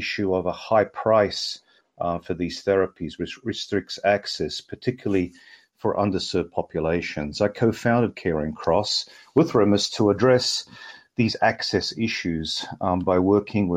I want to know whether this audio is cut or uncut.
uncut